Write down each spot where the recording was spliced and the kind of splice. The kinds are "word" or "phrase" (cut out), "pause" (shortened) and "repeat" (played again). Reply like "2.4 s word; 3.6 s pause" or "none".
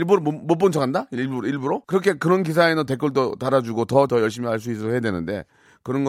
1.8 s pause; 2.9 s word; 4.1 s word